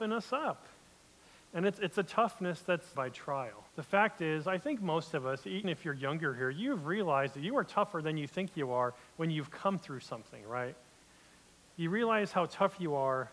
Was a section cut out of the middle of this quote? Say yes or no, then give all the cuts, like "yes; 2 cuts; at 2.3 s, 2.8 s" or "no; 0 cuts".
yes; 3 cuts; at 2.9 s, 3.7 s, 5.6 s